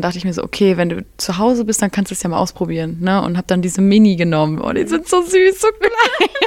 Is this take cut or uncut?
uncut